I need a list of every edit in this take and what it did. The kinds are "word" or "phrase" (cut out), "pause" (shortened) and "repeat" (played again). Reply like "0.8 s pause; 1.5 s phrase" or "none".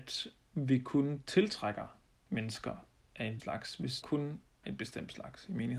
2.2 s pause; 3.4 s word; 4.0 s word; 4.6 s word